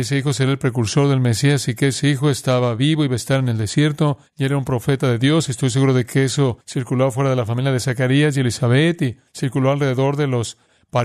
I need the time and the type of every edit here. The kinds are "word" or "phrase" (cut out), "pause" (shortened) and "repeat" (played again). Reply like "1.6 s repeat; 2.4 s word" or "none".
4.3 s pause; 6.6 s pause; 9.3 s pause